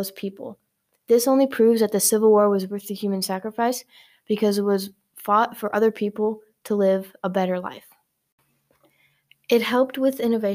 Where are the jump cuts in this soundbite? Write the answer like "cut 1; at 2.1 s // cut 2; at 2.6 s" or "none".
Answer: none

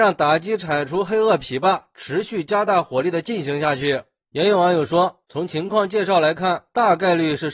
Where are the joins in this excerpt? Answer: none

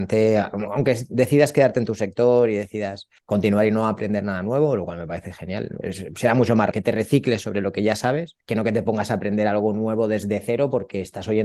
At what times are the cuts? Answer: cut 1; at 3.2 s // cut 2; at 6.7 s // cut 3; at 8.4 s

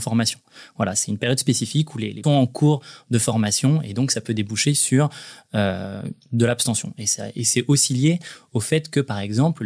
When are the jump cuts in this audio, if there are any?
cut 1; at 2.2 s

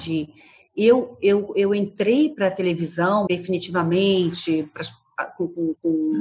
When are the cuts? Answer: cut 1; at 3.3 s

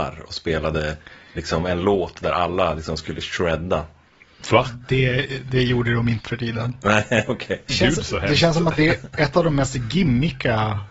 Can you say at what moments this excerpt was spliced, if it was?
cut 1; at 6.2 s // cut 2; at 7.7 s

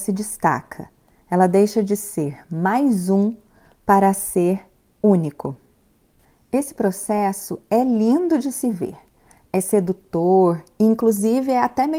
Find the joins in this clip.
none

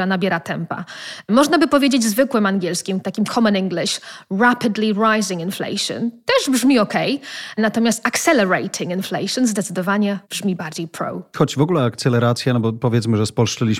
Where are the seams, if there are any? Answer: cut 1; at 10.2 s

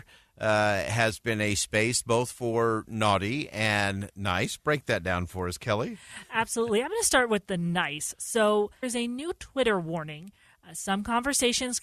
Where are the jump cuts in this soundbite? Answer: cut 1; at 8.8 s

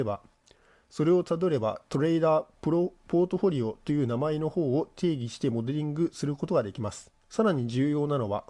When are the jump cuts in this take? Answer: cut 1; at 7.2 s

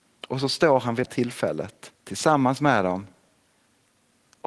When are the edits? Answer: cut 1; at 1.0 s // cut 2; at 2.0 s

